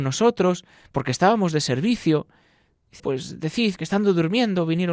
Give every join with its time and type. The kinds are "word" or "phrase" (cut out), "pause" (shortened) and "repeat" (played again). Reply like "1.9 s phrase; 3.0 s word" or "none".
3.0 s word; 3.8 s word